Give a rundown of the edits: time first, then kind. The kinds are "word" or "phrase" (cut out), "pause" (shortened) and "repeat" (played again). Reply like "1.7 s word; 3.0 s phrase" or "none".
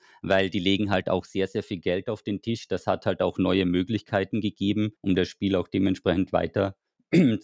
5.0 s pause